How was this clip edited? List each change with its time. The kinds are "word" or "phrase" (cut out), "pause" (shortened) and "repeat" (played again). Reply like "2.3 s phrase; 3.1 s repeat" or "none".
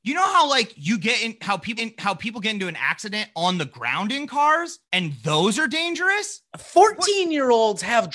1.8 s repeat; 4.9 s pause